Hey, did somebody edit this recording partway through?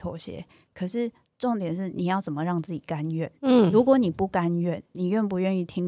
yes; 1 cut; at 3.4 s

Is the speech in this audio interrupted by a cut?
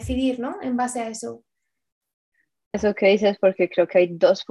yes; 1 cut; at 2.7 s

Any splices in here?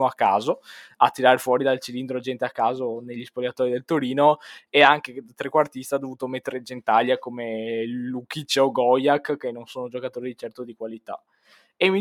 no; 0 cuts

